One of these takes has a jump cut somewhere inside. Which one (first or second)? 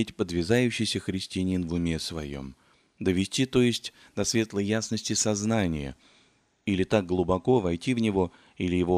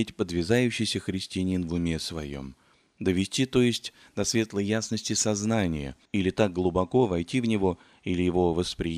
second